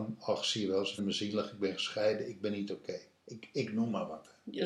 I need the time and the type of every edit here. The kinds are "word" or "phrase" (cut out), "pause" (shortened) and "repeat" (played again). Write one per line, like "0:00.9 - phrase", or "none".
0:01.0 - word

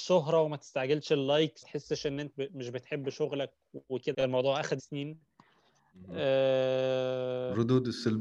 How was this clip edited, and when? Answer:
0:01.6 - word
0:02.3 - word
0:04.1 - word
0:04.8 - word

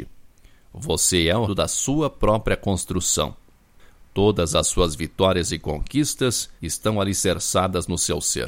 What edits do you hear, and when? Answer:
0:01.5 - word
0:06.6 - pause

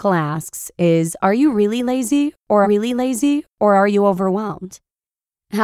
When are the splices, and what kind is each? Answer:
0:02.6 - repeat

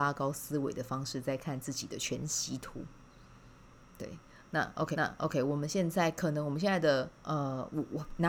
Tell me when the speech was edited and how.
0:04.9 - repeat
0:07.2 - pause

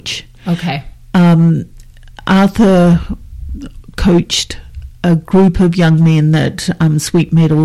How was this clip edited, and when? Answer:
0:04.9 - pause

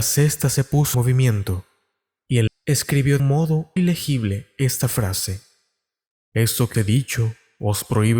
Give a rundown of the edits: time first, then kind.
0:00.9 - word
0:02.5 - word
0:03.2 - word
0:03.8 - word
0:06.7 - word

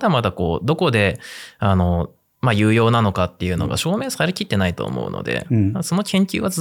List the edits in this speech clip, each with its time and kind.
none

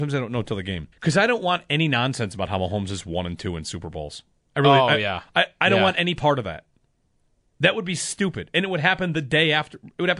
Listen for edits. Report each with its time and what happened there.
0:00.9 - pause
0:04.3 - pause

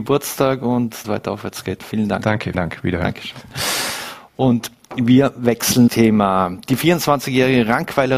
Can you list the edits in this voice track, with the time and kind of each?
0:01.0 - phrase
0:02.5 - word
0:05.9 - word

